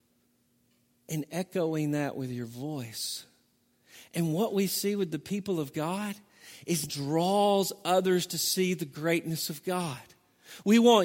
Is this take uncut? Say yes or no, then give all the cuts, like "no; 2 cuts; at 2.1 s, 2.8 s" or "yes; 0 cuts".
no; 1 cut; at 6.9 s